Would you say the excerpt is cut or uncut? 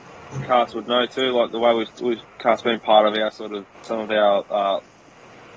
cut